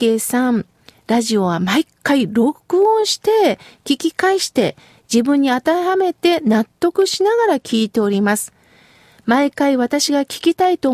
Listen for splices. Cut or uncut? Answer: uncut